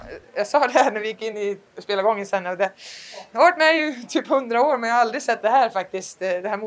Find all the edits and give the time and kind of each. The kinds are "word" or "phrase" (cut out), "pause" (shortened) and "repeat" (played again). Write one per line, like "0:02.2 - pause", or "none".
none